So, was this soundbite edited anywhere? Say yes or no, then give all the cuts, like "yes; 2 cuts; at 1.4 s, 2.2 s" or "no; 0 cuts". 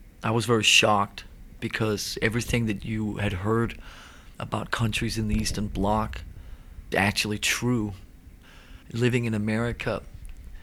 yes; 4 cuts; at 1.6 s, 4.3 s, 6.9 s, 8.8 s